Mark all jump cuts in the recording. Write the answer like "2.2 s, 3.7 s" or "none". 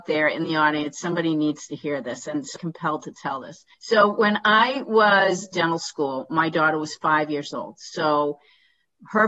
2.6 s, 3.7 s, 5.5 s

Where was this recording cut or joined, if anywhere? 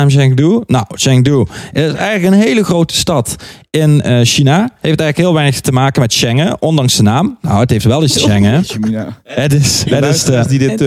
8.2 s

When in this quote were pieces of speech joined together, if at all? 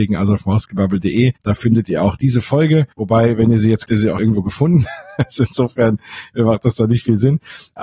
1.4 s, 2.9 s, 3.9 s, 4.2 s

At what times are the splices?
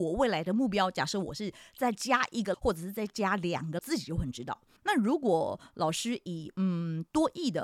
2.5 s, 3.8 s, 4.8 s

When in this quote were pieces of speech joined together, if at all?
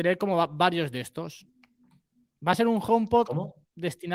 none

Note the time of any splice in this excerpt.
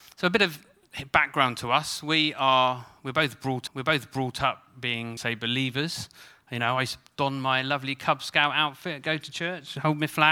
3.7 s, 5.2 s

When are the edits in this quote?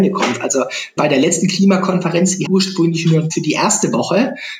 1.0 s, 2.5 s, 3.3 s

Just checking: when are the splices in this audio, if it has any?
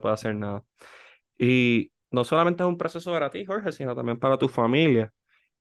2.0 s

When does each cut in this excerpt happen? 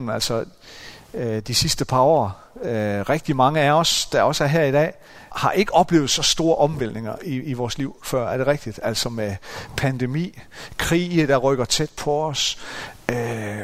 5.3 s

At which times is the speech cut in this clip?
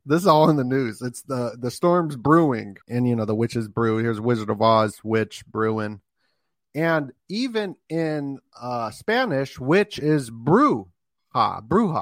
2.8 s

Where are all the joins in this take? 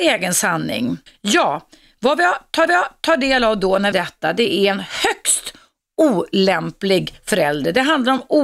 1.1 s, 2.7 s, 3.9 s

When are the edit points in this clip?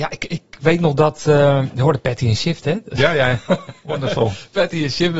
none

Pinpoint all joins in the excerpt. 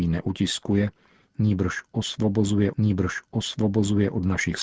2.7 s

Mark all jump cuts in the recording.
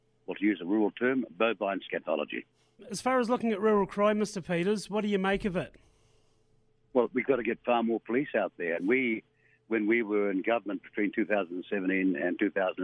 none

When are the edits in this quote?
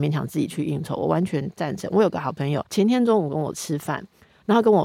2.7 s

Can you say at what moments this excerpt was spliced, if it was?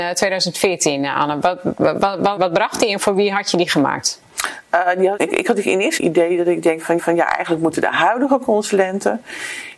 2.4 s, 5.2 s, 6.0 s, 7.0 s

